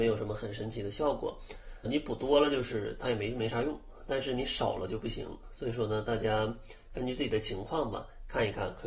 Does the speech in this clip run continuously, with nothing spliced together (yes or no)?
no